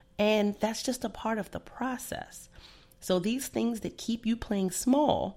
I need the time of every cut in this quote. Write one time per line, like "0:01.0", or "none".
none